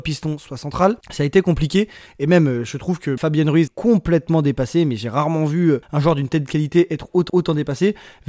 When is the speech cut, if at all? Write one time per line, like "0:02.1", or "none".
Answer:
0:01.0
0:03.2
0:03.7
0:05.8
0:07.3